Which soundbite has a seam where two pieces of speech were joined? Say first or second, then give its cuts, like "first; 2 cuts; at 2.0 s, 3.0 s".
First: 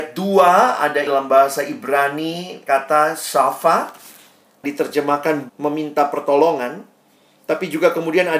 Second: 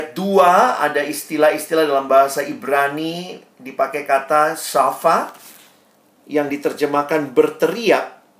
first; 4 cuts; at 1.1 s, 2.7 s, 4.6 s, 5.5 s